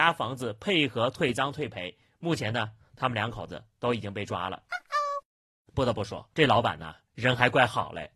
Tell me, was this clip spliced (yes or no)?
yes